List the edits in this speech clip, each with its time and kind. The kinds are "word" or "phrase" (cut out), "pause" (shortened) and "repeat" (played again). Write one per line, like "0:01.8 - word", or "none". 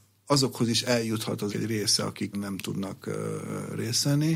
0:01.5 - word
0:02.3 - word